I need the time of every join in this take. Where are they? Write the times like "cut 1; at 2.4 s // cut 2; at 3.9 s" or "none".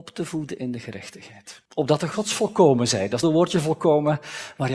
cut 1; at 1.7 s // cut 2; at 2.1 s // cut 3; at 3.2 s